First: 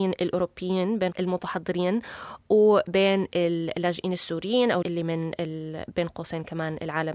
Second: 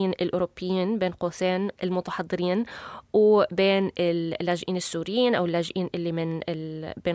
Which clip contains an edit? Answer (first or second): first